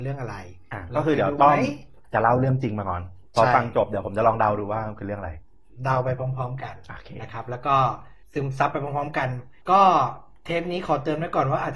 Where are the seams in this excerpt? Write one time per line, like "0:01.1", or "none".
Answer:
0:02.0
0:03.3
0:08.2
0:09.6

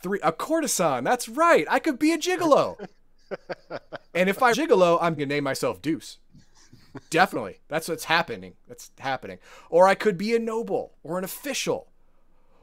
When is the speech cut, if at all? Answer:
0:04.5
0:05.2
0:11.0

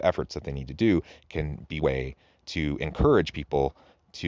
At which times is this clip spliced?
0:01.8

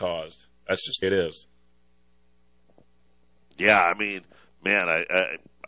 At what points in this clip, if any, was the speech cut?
0:01.0

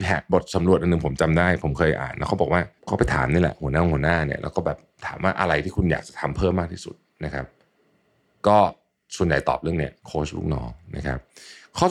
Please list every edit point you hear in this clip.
0:02.8
0:10.0

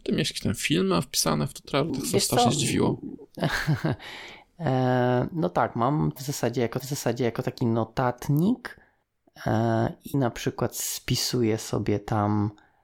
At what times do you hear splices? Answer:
0:01.9
0:06.2
0:06.8
0:10.1

